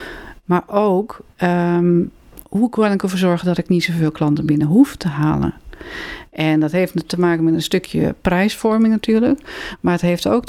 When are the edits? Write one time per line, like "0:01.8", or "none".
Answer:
none

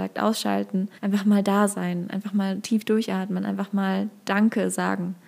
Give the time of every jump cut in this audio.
0:01.0

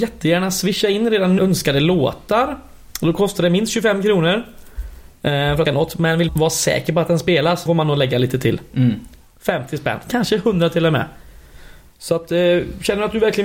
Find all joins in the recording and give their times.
0:01.4
0:05.7
0:06.3
0:07.7

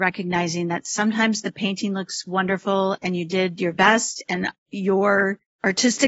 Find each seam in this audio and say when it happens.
0:03.7

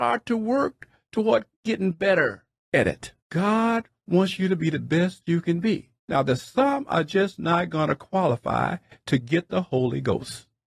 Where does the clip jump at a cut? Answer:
0:01.5
0:02.6
0:03.2
0:06.0

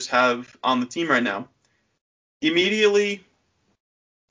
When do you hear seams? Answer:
none

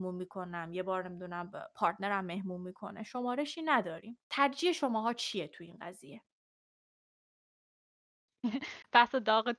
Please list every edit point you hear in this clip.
0:04.2

